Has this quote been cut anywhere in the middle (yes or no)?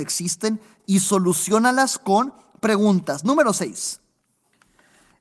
no